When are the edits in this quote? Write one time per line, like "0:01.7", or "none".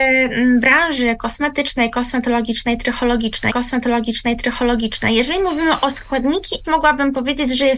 0:03.5
0:06.6